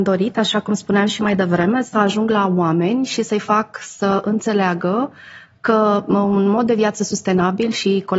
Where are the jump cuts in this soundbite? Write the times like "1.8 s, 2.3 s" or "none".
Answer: none